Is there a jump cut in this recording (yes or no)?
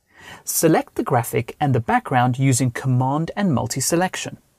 no